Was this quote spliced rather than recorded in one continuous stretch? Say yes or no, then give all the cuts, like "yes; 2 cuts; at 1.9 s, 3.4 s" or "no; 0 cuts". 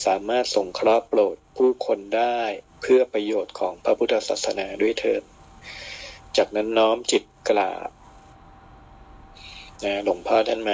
yes; 1 cut; at 9.7 s